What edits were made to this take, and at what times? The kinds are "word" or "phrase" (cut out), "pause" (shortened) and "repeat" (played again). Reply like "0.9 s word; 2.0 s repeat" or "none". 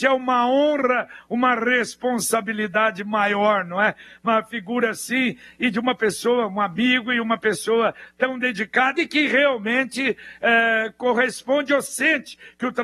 none